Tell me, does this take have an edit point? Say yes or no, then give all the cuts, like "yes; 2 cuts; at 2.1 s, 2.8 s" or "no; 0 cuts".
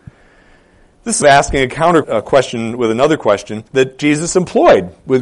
yes; 3 cuts; at 1.2 s, 2.0 s, 3.7 s